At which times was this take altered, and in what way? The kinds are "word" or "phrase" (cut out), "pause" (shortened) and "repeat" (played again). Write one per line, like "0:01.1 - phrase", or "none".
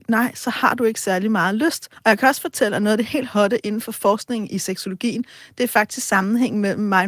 0:01.9 - pause